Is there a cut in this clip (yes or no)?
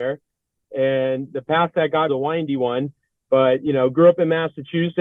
yes